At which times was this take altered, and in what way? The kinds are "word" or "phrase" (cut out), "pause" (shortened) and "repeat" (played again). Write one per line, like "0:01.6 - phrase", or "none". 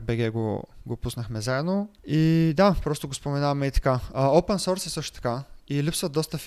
0:02.0 - pause